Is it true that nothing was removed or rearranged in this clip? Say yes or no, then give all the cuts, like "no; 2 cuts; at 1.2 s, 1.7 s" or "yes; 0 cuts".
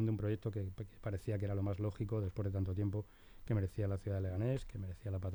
yes; 0 cuts